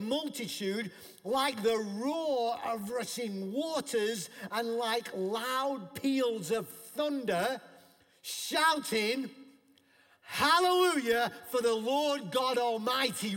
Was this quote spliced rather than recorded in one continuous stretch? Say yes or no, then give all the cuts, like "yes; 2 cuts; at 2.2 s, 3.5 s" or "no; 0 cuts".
no; 0 cuts